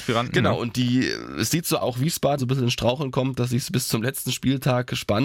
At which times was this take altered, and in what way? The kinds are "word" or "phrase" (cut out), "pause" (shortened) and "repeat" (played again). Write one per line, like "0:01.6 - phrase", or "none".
0:01.8 - phrase
0:02.4 - word